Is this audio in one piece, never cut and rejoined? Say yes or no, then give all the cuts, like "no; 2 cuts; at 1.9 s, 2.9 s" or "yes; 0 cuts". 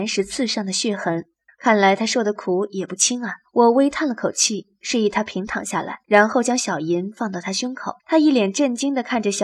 no; 4 cuts; at 1.5 s, 3.4 s, 6.0 s, 8.0 s